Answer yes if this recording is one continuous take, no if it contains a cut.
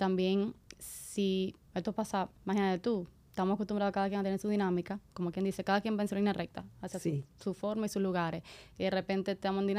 no